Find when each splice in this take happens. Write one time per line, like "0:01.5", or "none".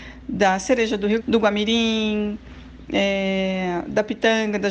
0:01.2